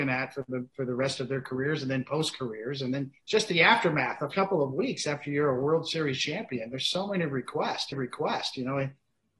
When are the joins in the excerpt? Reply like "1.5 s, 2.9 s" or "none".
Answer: 3.2 s, 4.3 s, 7.9 s